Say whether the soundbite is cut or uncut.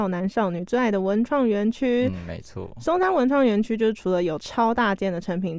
uncut